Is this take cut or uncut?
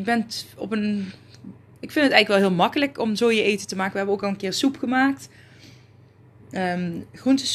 uncut